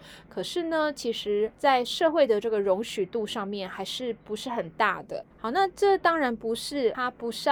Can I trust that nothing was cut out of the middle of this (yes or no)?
no